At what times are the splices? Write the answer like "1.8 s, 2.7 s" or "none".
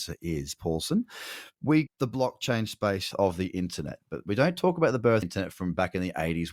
1.9 s, 3.1 s, 5.2 s